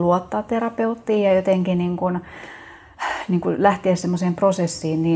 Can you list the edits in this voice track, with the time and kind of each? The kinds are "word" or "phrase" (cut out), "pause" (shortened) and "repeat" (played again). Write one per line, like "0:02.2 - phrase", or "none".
none